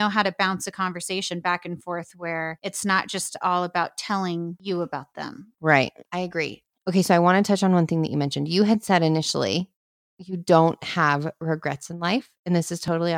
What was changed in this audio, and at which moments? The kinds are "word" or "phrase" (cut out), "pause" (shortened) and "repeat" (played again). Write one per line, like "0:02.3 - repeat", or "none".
none